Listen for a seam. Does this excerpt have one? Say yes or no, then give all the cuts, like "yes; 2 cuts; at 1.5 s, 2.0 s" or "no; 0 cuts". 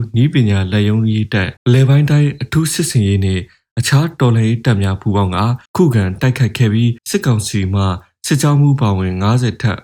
yes; 3 cuts; at 1.6 s, 5.7 s, 7.0 s